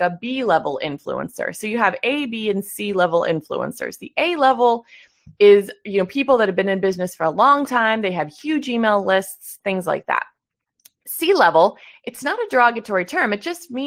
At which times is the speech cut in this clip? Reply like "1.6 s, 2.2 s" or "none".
none